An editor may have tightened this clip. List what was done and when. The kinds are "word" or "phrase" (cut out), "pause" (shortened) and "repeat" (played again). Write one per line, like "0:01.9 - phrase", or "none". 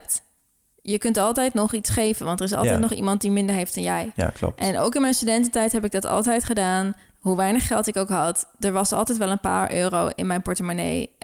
none